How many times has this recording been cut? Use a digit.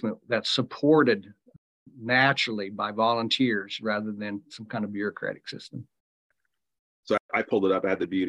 0